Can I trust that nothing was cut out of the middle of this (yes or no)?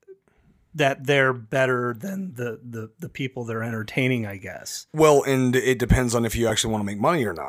yes